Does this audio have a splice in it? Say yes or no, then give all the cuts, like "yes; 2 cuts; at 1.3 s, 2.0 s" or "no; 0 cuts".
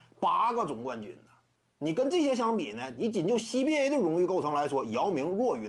no; 0 cuts